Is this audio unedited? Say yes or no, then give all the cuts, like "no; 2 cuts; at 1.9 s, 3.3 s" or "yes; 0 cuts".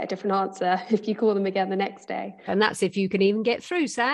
yes; 0 cuts